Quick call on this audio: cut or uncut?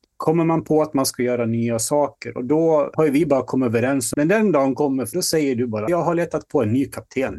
cut